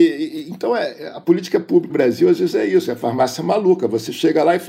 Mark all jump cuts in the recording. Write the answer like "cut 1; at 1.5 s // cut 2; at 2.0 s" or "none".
cut 1; at 1.9 s

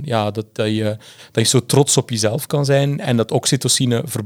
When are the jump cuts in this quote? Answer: none

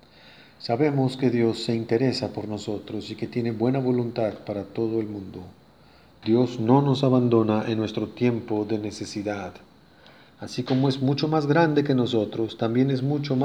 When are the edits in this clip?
none

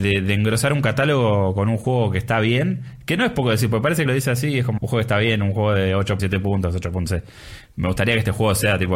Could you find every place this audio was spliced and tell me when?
cut 1; at 4.1 s // cut 2; at 4.8 s // cut 3; at 6.2 s // cut 4; at 7.1 s

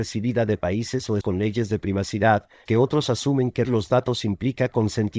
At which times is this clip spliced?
cut 1; at 1.2 s // cut 2; at 2.7 s // cut 3; at 3.6 s

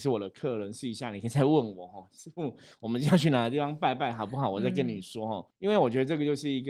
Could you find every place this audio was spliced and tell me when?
cut 1; at 5.5 s

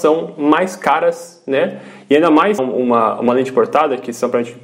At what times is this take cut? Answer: cut 1; at 2.6 s

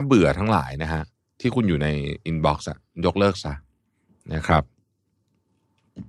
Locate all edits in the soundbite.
none

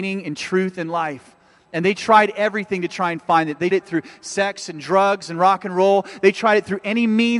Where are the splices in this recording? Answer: cut 1; at 3.7 s

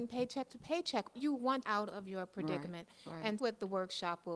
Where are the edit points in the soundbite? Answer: cut 1; at 1.1 s // cut 2; at 1.6 s // cut 3; at 3.4 s

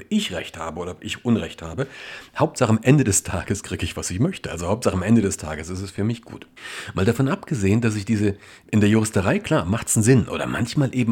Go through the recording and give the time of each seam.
none

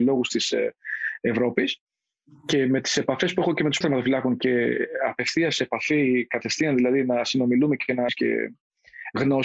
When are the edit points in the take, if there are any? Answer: cut 1; at 3.8 s // cut 2; at 8.1 s

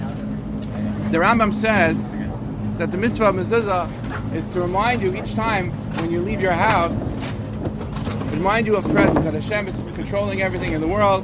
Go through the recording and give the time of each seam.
cut 1; at 8.8 s

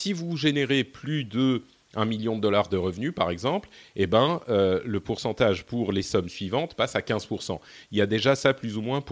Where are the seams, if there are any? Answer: none

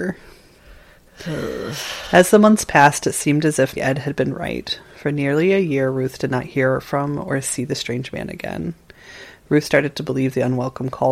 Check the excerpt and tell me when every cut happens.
cut 1; at 3.8 s

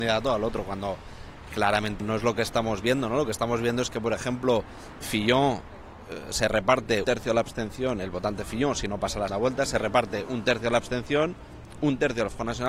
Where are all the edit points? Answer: cut 1; at 2.0 s // cut 2; at 5.0 s // cut 3; at 7.0 s // cut 4; at 9.3 s

